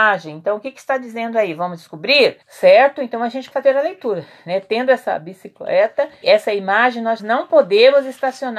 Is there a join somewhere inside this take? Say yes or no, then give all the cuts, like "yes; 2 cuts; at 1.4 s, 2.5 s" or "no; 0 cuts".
yes; 4 cuts; at 2.4 s, 3.5 s, 6.2 s, 7.2 s